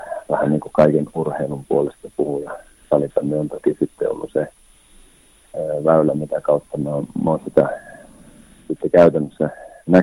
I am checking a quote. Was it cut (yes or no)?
no